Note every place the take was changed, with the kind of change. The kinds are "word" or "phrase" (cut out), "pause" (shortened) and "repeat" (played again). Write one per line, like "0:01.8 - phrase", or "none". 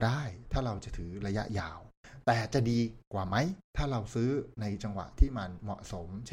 0:03.6 - pause